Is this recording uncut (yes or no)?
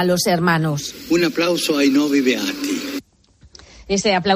yes